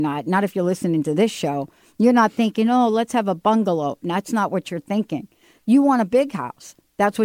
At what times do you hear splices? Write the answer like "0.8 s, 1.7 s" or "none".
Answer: none